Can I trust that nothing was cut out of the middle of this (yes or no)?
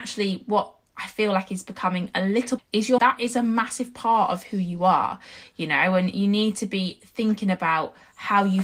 no